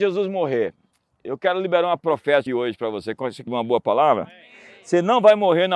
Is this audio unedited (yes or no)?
no